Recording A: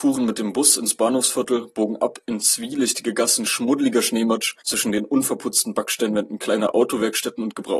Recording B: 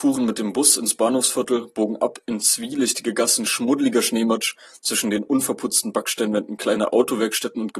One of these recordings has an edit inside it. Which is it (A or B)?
A